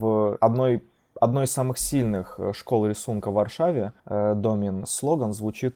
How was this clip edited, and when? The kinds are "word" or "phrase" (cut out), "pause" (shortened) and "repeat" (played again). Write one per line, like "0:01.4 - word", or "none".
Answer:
0:04.0 - pause

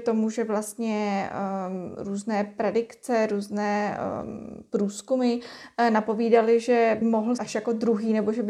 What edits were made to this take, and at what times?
0:07.0 - word
0:07.4 - word

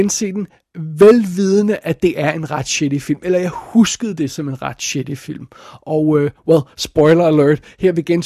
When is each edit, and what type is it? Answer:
none

